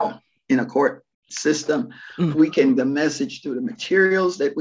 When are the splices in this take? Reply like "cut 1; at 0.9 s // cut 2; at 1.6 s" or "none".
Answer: cut 1; at 1.3 s // cut 2; at 2.8 s